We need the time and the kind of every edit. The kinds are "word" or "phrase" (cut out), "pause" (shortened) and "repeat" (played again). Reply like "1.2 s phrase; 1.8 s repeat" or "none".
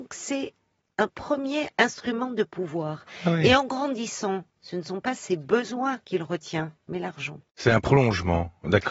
6.0 s pause; 6.8 s pause; 7.5 s pause